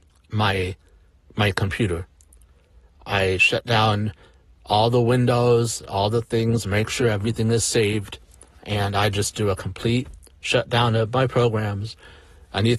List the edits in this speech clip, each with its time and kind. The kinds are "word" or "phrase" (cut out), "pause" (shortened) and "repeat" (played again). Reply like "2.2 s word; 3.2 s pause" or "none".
none